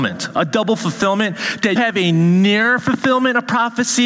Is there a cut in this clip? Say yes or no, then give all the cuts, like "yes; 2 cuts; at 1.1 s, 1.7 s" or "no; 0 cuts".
yes; 1 cut; at 1.8 s